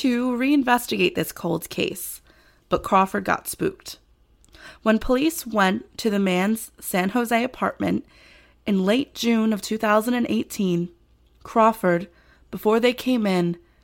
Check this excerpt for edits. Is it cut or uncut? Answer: uncut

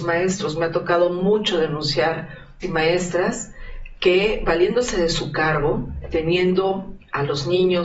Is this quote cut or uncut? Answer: cut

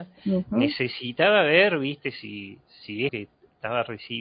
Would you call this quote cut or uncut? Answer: cut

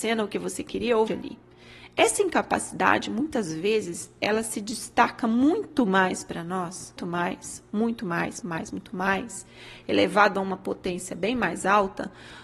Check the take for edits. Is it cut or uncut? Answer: cut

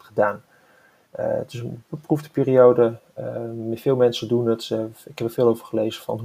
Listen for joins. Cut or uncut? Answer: uncut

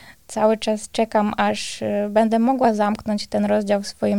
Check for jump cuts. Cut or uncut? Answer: uncut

